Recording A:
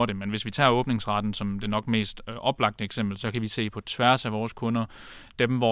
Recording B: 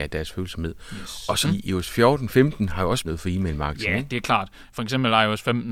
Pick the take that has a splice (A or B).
B